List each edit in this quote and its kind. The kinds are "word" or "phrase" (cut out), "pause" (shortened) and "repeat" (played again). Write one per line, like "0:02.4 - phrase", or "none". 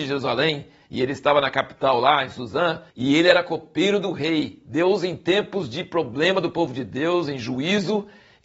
0:02.9 - pause